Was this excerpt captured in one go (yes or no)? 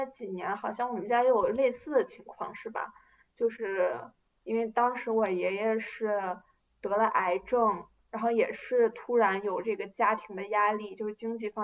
yes